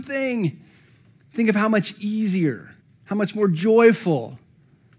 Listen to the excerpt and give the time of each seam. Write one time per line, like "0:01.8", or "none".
0:02.8